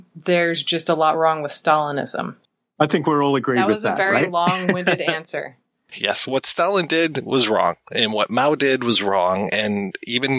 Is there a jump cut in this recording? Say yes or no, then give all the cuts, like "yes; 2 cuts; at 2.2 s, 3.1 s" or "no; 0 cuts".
no; 0 cuts